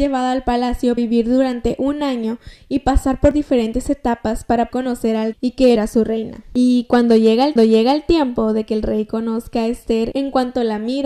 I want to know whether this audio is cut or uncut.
cut